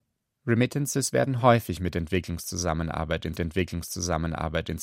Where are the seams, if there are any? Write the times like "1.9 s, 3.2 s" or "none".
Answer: 3.3 s